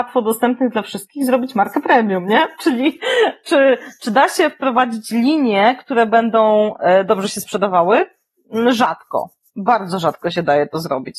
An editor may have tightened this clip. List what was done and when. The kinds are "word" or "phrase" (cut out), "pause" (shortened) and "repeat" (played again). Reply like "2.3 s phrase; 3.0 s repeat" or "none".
none